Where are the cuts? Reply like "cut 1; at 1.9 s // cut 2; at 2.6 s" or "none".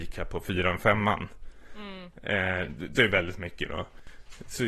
cut 1; at 3.0 s